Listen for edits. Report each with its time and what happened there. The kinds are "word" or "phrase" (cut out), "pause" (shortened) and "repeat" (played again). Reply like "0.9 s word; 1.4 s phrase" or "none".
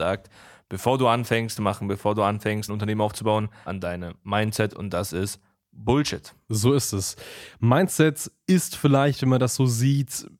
1.6 s phrase; 2.7 s word; 3.7 s word